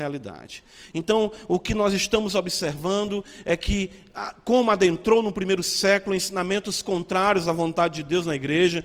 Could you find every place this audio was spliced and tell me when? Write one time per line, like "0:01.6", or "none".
none